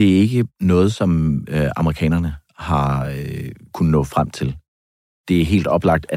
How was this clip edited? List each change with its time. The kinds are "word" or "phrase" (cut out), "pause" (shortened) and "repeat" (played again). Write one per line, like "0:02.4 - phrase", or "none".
none